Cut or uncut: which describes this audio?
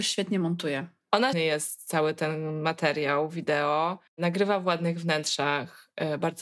cut